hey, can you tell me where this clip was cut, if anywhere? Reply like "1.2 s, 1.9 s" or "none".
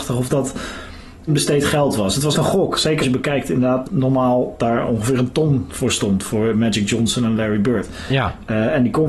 1.3 s, 2.3 s, 3.0 s, 3.8 s